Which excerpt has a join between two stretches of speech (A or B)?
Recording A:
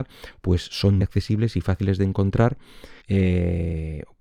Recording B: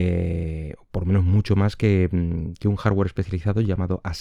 A